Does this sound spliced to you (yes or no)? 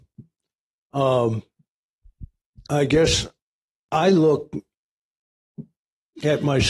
no